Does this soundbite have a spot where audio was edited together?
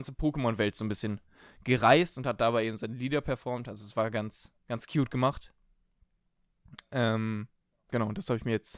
no; 0 cuts

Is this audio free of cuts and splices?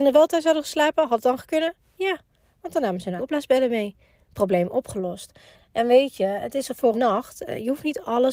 no; 2 cuts; at 3.2 s, 6.9 s

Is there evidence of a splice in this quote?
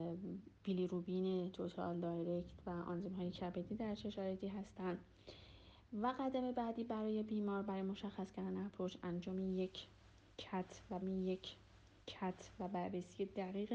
yes; 1 cut; at 11.0 s

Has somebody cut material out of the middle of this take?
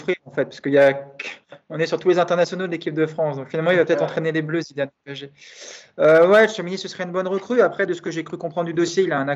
no; 0 cuts

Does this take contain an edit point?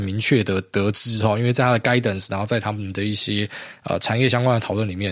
no; 0 cuts

